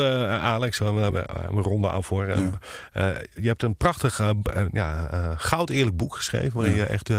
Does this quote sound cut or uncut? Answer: cut